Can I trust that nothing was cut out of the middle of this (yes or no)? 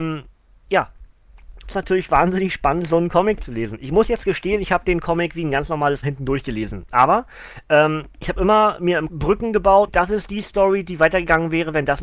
no